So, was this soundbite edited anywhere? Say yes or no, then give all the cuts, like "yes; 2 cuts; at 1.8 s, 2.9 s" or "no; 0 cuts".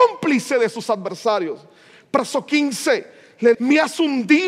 yes; 1 cut; at 3.5 s